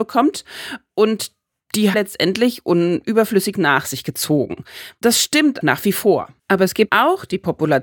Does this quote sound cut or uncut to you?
cut